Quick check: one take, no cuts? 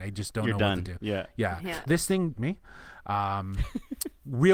no; 2 cuts; at 1.9 s, 2.4 s

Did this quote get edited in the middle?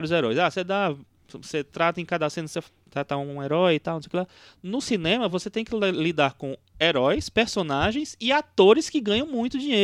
no; 0 cuts

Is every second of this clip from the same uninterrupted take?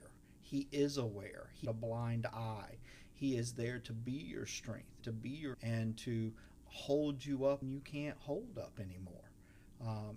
no; 5 cuts; at 1.6 s, 5.0 s, 5.5 s, 6.6 s, 7.6 s

